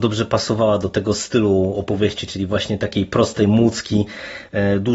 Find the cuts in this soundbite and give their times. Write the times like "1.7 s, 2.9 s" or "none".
none